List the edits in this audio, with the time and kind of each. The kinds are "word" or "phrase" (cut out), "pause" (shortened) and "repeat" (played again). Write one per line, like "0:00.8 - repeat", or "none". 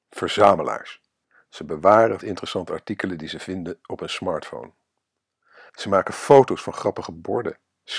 0:01.2 - pause
0:02.2 - word
0:05.7 - pause